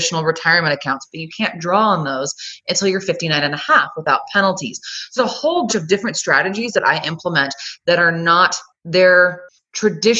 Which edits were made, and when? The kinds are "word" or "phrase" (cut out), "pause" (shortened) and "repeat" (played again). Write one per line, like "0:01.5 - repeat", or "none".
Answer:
0:05.2 - word
0:05.7 - word